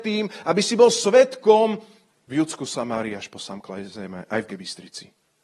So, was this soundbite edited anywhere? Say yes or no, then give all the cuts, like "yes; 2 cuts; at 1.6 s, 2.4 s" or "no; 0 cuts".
yes; 1 cut; at 4.5 s